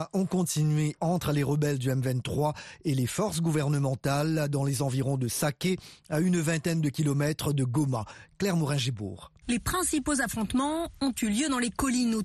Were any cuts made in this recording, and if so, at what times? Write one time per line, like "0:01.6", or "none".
0:01.0